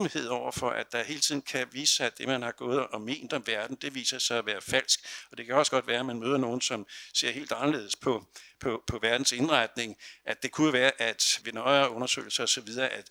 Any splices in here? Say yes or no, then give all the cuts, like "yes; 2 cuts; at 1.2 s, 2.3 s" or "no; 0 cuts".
yes; 1 cut; at 11.4 s